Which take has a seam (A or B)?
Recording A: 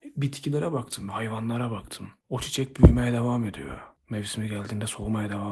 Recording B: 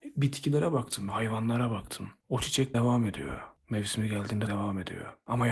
B